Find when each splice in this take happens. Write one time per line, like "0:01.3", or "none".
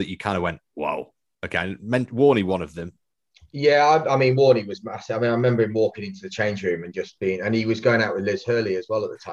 none